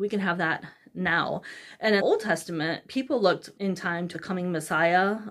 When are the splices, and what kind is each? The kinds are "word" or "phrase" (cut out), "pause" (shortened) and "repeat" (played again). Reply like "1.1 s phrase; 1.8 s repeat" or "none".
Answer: 2.0 s word; 3.6 s word; 4.1 s word